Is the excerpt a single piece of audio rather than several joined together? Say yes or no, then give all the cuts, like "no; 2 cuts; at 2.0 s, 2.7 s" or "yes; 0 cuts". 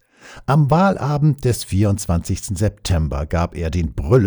yes; 0 cuts